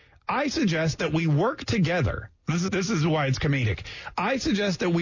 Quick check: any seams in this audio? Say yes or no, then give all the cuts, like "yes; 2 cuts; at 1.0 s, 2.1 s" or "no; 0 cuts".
yes; 2 cuts; at 2.4 s, 2.7 s